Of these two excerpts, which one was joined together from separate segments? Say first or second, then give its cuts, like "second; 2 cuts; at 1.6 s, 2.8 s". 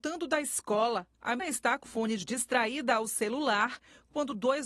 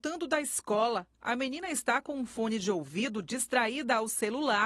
first; 3 cuts; at 1.4 s, 1.8 s, 2.2 s